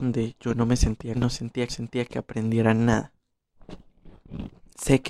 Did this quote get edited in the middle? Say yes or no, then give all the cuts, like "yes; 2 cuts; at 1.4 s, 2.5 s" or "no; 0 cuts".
yes; 2 cuts; at 1.1 s, 1.7 s